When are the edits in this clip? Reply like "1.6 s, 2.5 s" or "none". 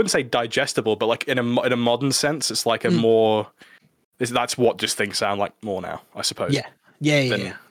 none